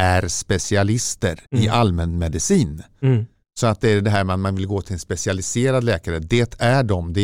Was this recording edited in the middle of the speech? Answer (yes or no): yes